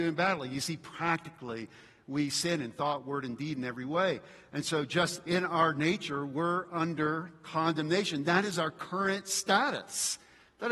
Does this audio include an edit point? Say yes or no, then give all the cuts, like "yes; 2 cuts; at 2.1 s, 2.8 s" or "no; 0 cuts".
no; 0 cuts